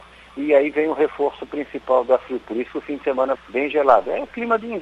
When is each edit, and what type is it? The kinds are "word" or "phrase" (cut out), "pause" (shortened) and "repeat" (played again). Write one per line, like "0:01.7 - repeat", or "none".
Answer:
0:03.4 - phrase